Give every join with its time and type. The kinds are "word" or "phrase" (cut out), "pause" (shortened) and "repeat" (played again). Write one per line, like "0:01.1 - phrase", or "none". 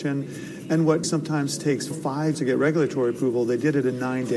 0:01.0 - word
0:01.9 - word
0:02.3 - word

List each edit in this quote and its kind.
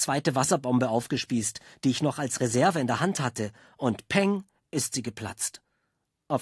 none

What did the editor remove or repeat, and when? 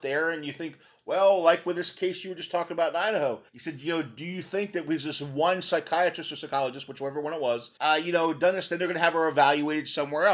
0:03.5 - pause
0:07.8 - pause

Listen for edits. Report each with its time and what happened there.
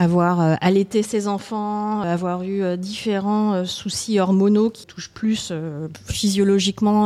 0:02.0 - word
0:04.8 - word

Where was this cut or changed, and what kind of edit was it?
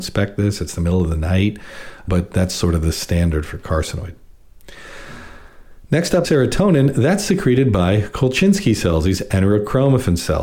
0:02.1 - word
0:06.2 - word

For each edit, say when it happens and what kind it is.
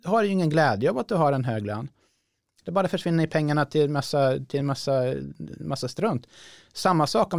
none

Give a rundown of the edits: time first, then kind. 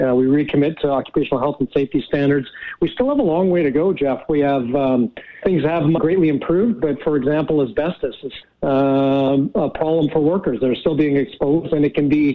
0:05.4 - word
0:06.0 - word
0:08.4 - word

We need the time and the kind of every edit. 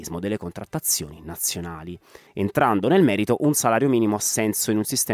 none

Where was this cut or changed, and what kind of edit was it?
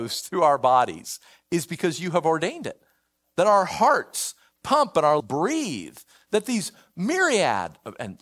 0:05.2 - word

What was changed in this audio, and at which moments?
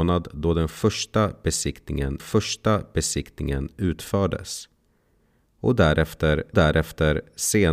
0:02.2 - repeat
0:06.5 - repeat

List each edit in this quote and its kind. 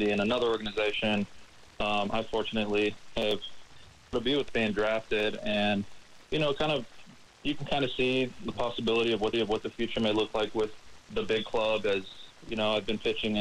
0:04.1 - word
0:04.5 - phrase
0:07.3 - pause
0:08.5 - word
0:09.3 - repeat
0:11.0 - pause

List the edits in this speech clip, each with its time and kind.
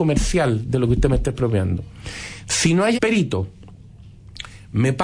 0:02.9 - word

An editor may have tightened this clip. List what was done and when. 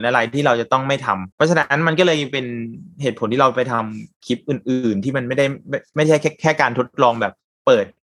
0:01.3 - pause

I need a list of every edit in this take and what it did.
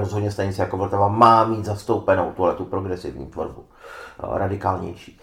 none

